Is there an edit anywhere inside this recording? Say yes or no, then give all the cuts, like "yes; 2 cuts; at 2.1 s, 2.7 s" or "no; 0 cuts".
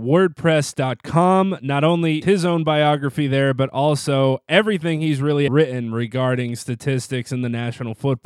yes; 2 cuts; at 2.2 s, 5.5 s